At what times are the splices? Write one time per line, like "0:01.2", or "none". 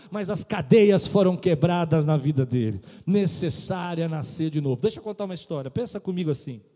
none